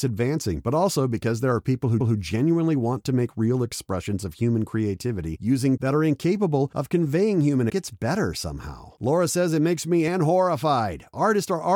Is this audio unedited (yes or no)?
no